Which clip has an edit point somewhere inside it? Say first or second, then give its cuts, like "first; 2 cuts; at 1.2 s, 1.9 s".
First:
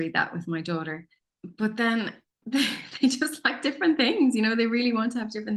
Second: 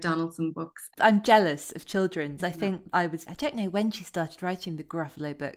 second; 3 cuts; at 2.4 s, 2.9 s, 3.3 s